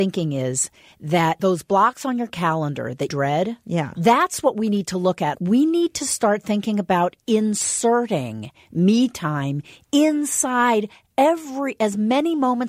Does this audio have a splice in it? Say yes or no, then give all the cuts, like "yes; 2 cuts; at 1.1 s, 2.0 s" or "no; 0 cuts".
yes; 3 cuts; at 1.4 s, 3.1 s, 5.3 s